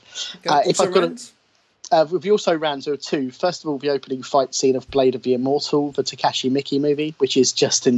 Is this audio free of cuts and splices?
yes; 0 cuts

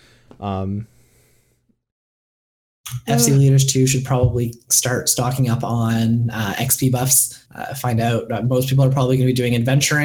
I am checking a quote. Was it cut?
yes; 1 cut; at 7.5 s

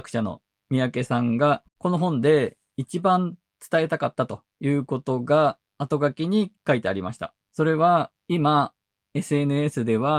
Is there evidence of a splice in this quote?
yes; 6 cuts; at 1.7 s, 4.5 s, 5.7 s, 6.6 s, 7.4 s, 8.2 s

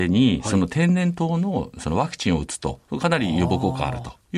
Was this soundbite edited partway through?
yes; 1 cut; at 2.8 s

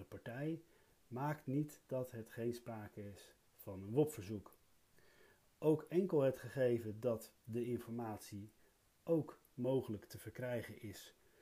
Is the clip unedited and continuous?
yes; 0 cuts

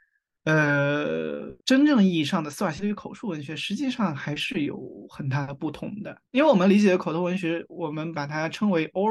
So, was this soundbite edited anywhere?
yes; 2 cuts; at 1.6 s, 6.3 s

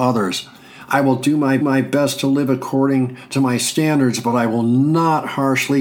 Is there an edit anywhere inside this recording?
yes; 1 cut; at 1.6 s

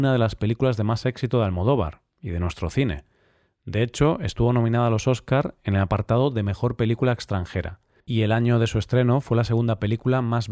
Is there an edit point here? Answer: no; 0 cuts

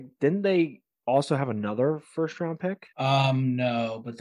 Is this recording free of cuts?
no; 1 cut; at 2.9 s

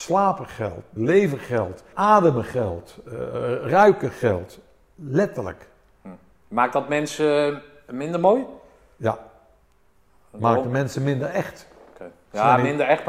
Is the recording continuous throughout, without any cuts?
no; 2 cuts; at 1.0 s, 1.9 s

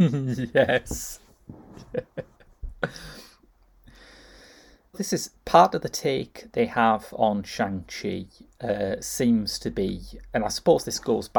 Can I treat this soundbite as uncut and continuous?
no; 1 cut; at 4.9 s

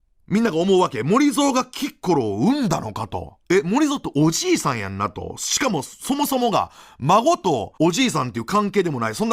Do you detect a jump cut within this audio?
yes; 2 cuts; at 3.4 s, 7.8 s

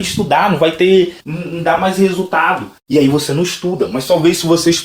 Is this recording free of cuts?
yes; 0 cuts

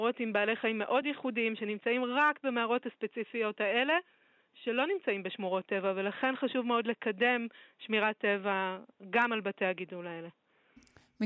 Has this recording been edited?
no; 0 cuts

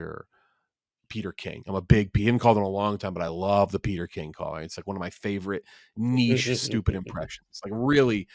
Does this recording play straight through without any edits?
yes; 0 cuts

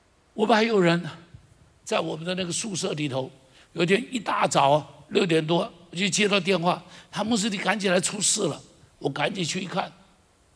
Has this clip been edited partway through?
no; 0 cuts

